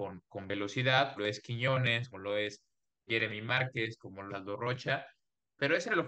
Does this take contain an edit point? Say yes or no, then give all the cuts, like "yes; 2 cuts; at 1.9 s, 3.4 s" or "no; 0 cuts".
yes; 4 cuts; at 1.2 s, 2.1 s, 3.1 s, 4.3 s